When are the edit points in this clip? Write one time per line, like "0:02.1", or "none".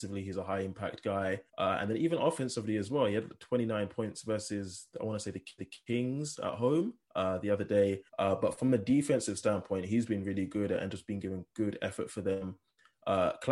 0:01.5
0:05.6
0:07.0
0:08.1